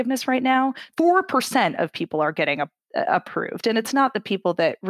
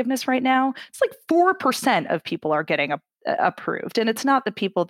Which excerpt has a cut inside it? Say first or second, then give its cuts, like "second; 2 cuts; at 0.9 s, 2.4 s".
first; 1 cut; at 0.9 s